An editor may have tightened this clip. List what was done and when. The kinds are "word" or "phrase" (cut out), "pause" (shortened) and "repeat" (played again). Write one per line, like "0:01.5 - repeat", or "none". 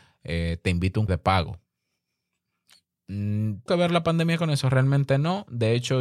0:01.1 - word
0:03.7 - word